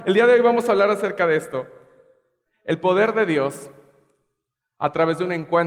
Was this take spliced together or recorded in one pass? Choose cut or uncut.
uncut